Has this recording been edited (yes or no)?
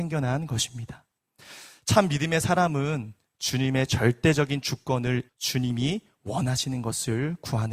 yes